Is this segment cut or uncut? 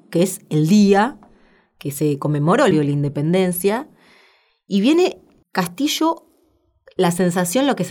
cut